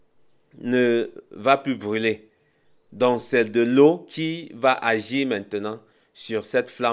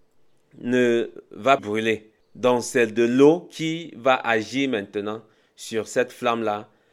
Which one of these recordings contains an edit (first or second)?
second